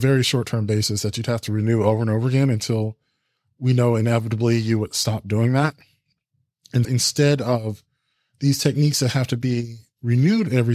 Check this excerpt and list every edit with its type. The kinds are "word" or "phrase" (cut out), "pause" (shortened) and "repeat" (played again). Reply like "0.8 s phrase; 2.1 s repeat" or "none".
6.8 s word